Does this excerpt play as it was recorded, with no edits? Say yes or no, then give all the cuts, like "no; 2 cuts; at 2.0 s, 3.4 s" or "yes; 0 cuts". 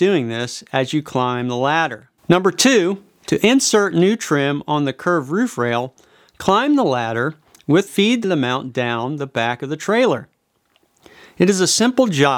no; 3 cuts; at 2.2 s, 7.9 s, 8.2 s